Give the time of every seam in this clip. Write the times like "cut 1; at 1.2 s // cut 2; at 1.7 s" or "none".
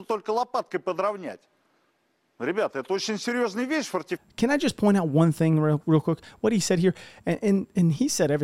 none